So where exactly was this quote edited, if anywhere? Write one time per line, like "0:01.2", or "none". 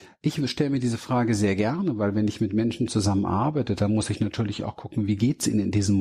none

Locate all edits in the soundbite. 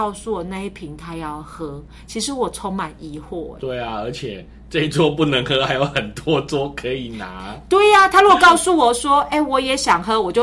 0:03.6

